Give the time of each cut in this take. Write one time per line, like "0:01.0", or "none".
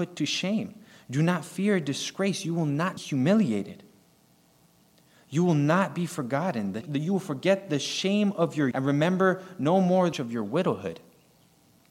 0:03.0
0:06.8
0:08.7
0:10.1